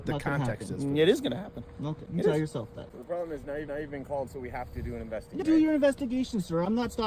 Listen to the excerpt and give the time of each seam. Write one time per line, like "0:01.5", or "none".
0:03.7
0:04.3
0:05.4